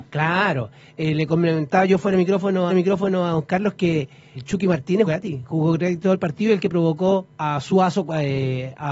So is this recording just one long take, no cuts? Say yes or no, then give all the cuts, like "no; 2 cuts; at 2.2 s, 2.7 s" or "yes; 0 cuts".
no; 3 cuts; at 2.7 s, 4.4 s, 5.1 s